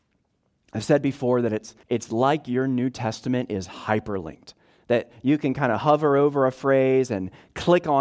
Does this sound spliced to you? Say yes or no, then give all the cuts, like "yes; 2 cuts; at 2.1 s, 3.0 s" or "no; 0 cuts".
yes; 1 cut; at 1.8 s